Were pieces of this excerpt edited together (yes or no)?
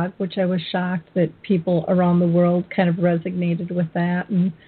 no